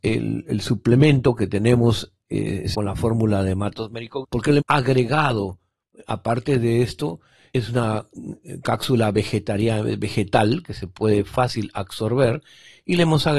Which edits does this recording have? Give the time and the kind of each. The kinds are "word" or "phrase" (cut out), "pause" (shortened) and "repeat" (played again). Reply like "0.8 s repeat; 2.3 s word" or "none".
2.7 s word; 4.2 s word; 4.6 s word; 7.5 s word